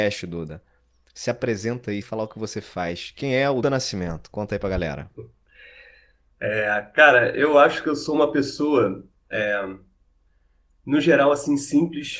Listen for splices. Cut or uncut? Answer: cut